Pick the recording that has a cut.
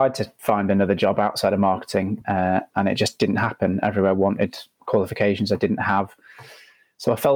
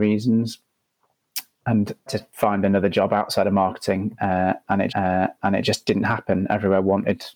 second; 2 cuts; at 2.1 s, 4.9 s

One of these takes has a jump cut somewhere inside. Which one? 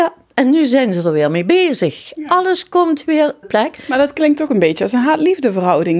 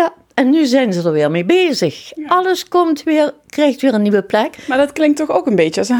first; 2 cuts; at 3.4 s, 4.5 s

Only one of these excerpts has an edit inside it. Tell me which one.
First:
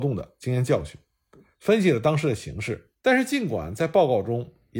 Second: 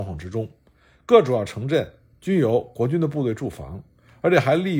first; 1 cut; at 2.9 s

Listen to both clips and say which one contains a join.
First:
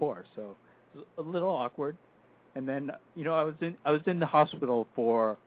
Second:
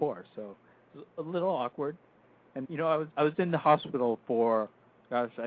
second; 2 cuts; at 2.6 s, 3.1 s

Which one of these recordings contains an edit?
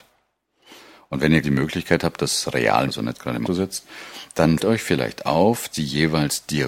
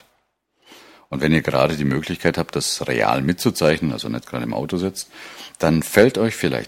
first; 5 cuts; at 1.4 s, 2.9 s, 3.5 s, 4.6 s, 5.7 s

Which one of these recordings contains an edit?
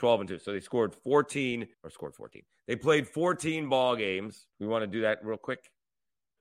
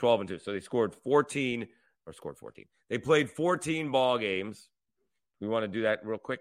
first; 2 cuts; at 1.7 s, 4.5 s

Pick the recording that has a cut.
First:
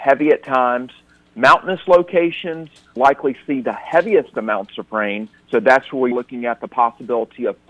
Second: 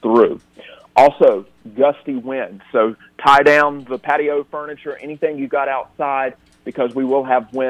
first; 2 cuts; at 3.0 s, 6.1 s

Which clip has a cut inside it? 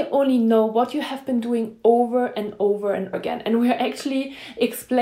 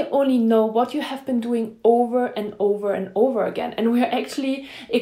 first; 1 cut; at 3.1 s

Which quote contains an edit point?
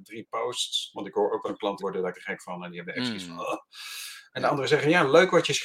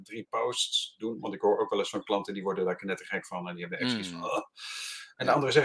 first; 4 cuts; at 0.9 s, 1.4 s, 1.8 s, 2.1 s

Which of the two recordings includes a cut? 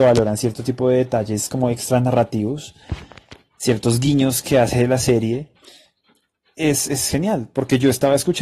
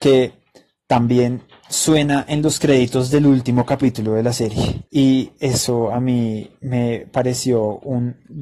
second; 1 cut; at 4.9 s

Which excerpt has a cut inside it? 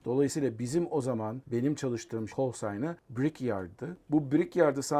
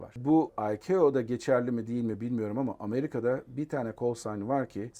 first; 1 cut; at 2.3 s

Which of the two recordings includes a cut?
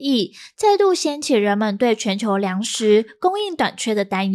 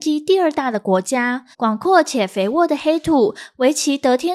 second; 1 cut; at 1.5 s

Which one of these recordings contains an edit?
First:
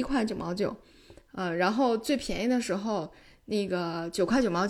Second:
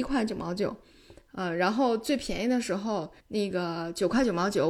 second; 1 cut; at 3.2 s

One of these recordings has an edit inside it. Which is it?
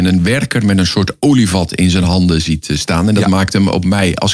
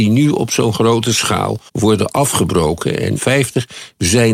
second; 2 cuts; at 1.7 s, 3.2 s

